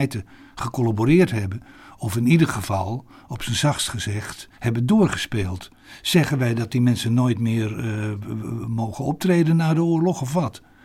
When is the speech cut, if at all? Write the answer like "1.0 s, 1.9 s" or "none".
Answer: 4.5 s

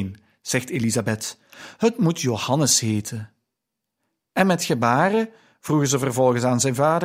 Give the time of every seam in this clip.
none

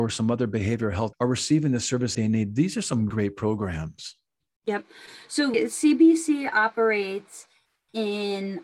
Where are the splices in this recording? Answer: 1.1 s, 2.1 s, 3.1 s, 5.5 s

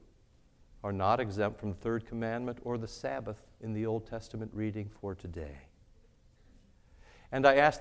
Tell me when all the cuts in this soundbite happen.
none

